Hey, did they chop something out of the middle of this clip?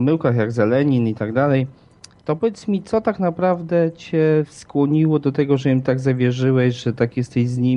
no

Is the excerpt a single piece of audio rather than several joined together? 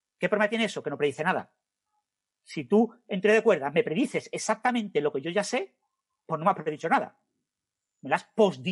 yes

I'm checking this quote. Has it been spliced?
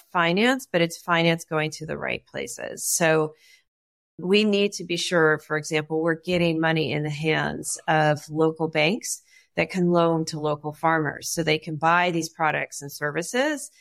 no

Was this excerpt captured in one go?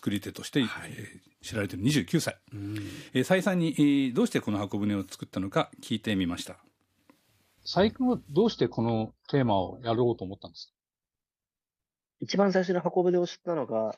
yes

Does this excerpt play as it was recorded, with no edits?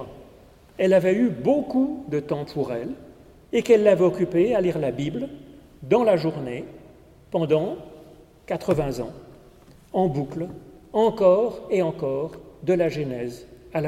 yes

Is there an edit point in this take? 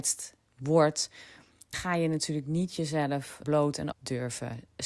yes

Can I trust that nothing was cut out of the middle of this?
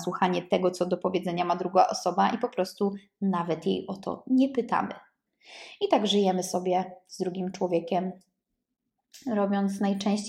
yes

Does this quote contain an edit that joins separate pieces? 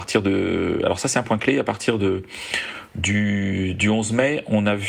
no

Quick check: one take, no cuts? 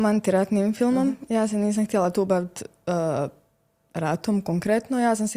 yes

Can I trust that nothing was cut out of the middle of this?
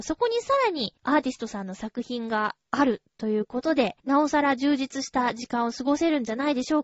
no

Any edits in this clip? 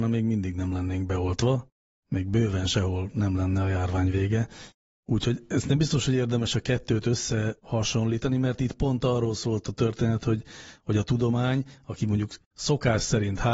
no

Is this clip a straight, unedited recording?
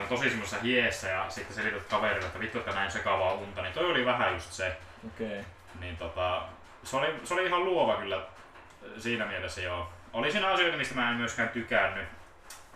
yes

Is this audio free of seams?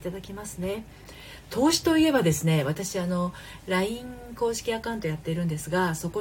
yes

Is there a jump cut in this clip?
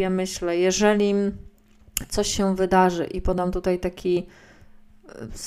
no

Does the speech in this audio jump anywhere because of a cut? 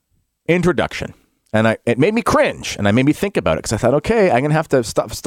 no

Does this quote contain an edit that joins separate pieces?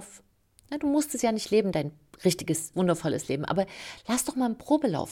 yes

